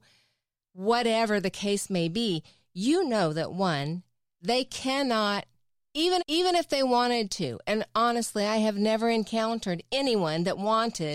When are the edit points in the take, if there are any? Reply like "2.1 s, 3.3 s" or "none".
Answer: 6.2 s